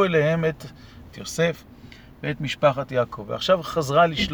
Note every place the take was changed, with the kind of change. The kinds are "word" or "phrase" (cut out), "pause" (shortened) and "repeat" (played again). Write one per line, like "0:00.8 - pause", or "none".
0:01.1 - word